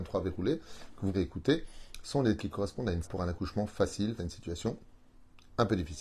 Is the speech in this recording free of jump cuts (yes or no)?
no